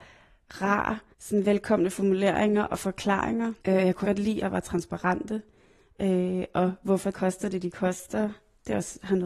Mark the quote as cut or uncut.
cut